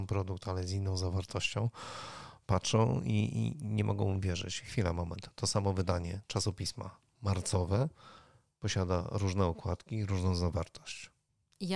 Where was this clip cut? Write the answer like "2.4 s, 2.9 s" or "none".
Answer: none